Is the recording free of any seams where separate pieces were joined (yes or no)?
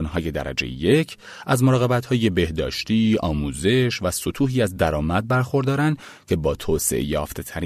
yes